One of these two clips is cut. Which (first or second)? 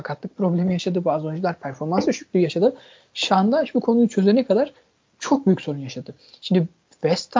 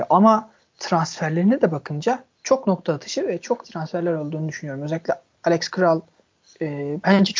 second